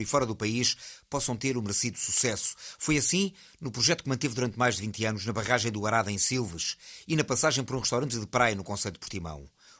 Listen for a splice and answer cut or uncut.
uncut